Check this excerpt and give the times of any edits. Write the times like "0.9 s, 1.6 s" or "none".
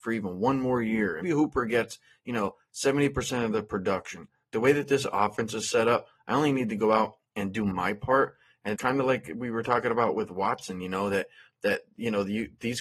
1.2 s, 8.7 s